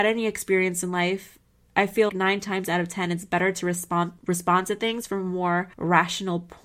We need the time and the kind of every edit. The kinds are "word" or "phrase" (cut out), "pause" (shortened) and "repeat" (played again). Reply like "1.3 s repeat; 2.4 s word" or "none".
2.1 s word; 4.2 s pause; 5.7 s pause